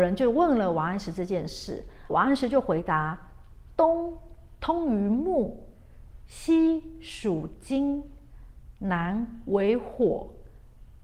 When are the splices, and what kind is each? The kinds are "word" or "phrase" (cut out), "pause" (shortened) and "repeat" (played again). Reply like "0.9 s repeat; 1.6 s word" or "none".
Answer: 2.1 s word